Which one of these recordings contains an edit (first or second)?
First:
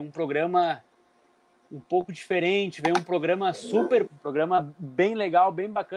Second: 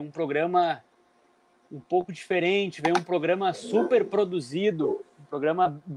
first